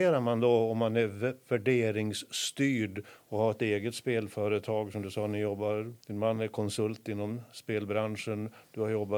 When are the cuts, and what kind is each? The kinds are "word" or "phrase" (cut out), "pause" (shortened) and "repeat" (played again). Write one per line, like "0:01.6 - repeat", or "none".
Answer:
0:06.0 - pause